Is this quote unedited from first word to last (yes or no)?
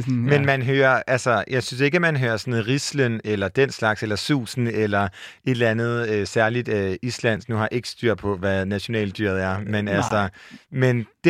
yes